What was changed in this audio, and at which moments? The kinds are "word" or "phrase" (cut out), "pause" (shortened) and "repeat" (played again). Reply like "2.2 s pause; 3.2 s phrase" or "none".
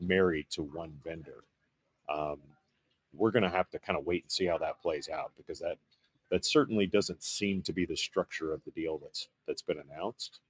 none